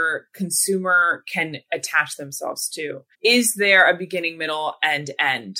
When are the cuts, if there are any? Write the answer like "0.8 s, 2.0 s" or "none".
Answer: 3.1 s